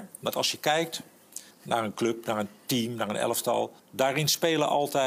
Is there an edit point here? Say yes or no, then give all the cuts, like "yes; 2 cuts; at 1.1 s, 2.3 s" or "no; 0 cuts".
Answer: yes; 2 cuts; at 1.5 s, 3.8 s